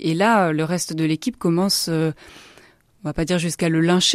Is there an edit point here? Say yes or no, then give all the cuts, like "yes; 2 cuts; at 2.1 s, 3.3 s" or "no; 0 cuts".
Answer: no; 0 cuts